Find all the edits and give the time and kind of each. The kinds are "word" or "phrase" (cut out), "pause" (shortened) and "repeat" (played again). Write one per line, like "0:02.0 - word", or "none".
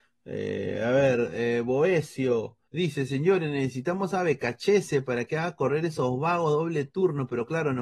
0:02.6 - pause